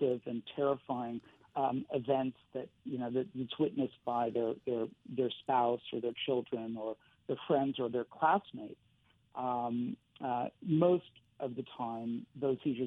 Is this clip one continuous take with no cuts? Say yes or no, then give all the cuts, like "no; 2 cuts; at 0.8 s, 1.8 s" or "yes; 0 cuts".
yes; 0 cuts